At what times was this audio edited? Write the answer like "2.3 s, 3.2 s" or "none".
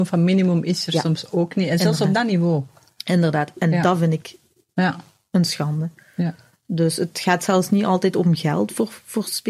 none